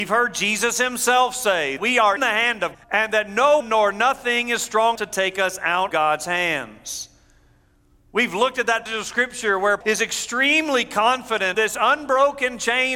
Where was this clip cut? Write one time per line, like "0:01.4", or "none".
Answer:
0:01.8
0:02.2
0:02.7
0:03.6
0:05.0
0:05.9
0:08.9
0:09.8
0:11.5